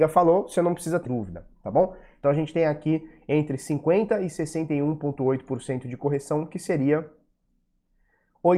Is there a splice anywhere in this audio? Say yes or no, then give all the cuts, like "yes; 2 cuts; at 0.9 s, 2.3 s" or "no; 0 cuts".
yes; 1 cut; at 1.1 s